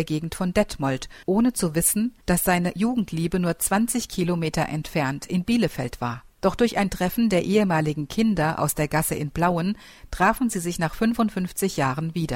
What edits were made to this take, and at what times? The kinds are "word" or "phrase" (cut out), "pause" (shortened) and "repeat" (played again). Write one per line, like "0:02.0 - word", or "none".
0:01.2 - pause
0:02.2 - pause
0:06.3 - pause